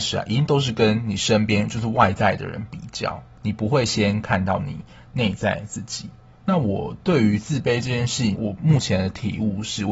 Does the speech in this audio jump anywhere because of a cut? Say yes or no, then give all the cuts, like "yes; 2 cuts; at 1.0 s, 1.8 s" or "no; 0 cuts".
yes; 1 cut; at 8.4 s